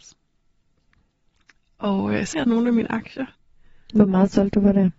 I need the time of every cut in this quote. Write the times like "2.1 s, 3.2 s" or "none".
2.3 s